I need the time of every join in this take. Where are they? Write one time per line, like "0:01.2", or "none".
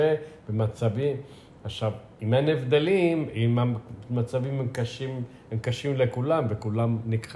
none